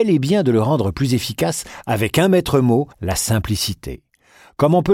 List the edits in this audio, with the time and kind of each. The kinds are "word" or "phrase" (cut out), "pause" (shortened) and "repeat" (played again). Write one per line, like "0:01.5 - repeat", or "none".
0:02.9 - pause